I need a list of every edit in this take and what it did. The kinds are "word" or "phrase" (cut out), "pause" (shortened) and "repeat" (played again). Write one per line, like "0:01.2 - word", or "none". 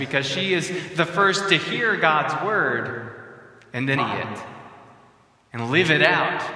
0:04.0 - word